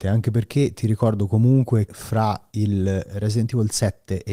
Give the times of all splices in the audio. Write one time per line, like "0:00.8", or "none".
0:01.9